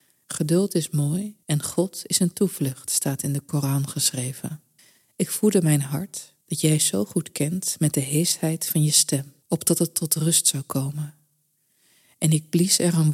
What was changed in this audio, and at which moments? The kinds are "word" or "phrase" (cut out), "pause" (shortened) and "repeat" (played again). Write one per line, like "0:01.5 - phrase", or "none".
0:01.4 - pause
0:04.8 - pause
0:06.4 - pause
0:09.4 - pause